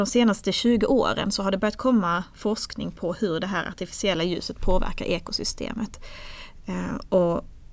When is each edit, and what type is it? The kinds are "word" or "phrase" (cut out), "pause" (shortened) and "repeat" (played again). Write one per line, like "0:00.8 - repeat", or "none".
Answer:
none